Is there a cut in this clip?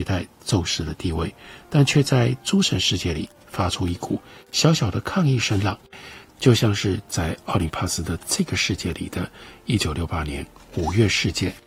no; 0 cuts

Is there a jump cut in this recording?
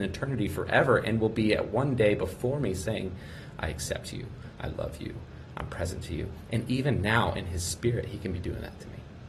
no; 0 cuts

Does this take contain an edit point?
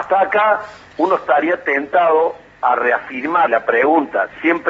yes; 1 cut; at 3.5 s

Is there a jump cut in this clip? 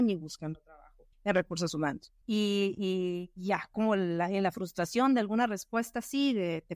yes; 2 cuts; at 1.1 s, 2.2 s

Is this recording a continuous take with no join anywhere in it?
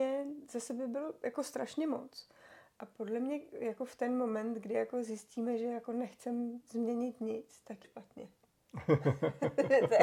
no; 1 cut; at 7.8 s

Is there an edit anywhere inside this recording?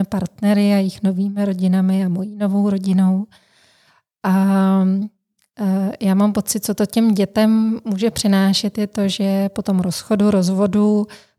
no; 0 cuts

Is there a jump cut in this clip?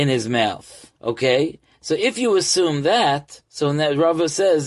yes; 1 cut; at 1.0 s

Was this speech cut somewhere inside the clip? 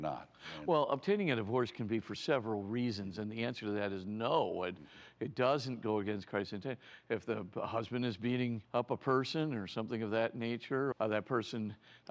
yes; 2 cuts; at 8.6 s, 10.9 s

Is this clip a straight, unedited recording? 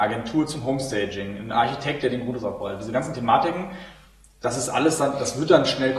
yes; 0 cuts

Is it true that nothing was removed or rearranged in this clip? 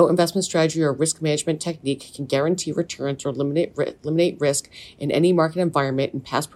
yes; 0 cuts

